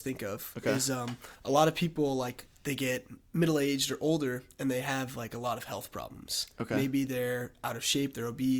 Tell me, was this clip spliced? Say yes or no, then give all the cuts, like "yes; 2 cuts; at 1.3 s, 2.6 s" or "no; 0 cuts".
yes; 1 cut; at 1.3 s